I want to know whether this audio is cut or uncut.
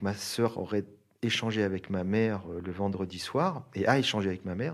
uncut